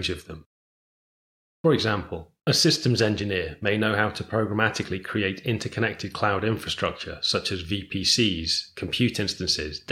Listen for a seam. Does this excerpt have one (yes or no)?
yes